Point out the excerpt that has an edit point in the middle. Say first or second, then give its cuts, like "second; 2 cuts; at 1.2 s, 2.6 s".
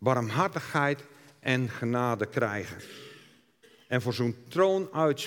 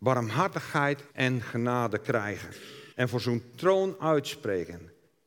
second; 2 cuts; at 1.1 s, 2.9 s